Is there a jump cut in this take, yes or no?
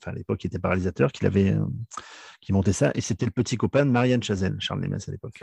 no